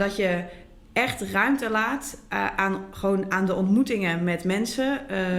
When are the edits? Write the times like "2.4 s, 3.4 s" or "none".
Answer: none